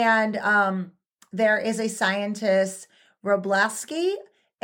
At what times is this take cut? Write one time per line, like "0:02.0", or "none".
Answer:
none